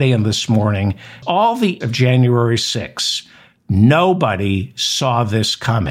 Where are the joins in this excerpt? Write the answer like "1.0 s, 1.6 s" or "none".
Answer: 1.2 s, 1.8 s